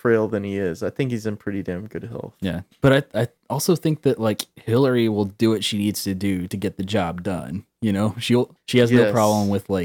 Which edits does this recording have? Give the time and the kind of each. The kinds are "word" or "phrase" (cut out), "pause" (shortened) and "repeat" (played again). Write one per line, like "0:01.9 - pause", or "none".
none